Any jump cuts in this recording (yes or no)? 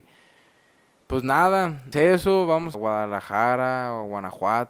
yes